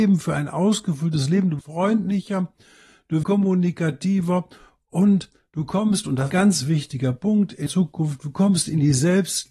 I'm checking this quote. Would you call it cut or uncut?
cut